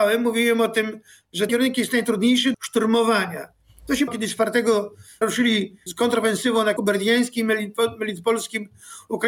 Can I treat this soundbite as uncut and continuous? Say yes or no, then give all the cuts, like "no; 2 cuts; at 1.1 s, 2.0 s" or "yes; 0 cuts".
no; 6 cuts; at 1.5 s, 2.5 s, 4.1 s, 5.2 s, 5.9 s, 6.8 s